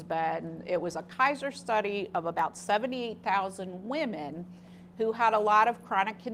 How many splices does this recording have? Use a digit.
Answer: 0